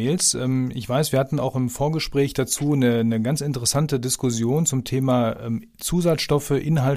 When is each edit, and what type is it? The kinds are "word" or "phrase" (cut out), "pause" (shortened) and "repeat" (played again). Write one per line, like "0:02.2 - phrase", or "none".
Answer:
none